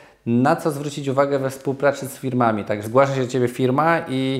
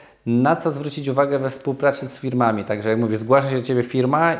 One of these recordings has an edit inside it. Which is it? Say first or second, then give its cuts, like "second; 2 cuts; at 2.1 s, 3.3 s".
first; 1 cut; at 2.8 s